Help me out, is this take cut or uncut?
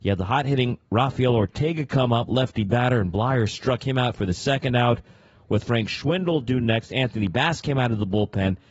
uncut